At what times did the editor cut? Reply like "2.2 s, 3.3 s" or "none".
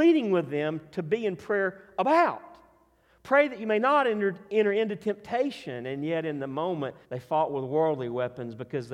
7.0 s